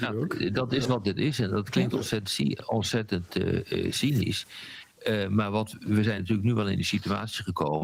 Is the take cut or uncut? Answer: uncut